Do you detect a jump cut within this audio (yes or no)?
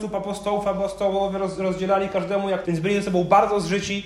yes